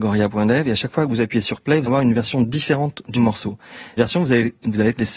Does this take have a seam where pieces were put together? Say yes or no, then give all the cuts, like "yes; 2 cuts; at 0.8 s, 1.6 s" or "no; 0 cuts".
yes; 3 cuts; at 1.9 s, 3.1 s, 4.0 s